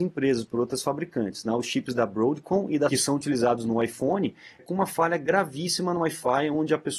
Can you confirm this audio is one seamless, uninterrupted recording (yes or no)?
no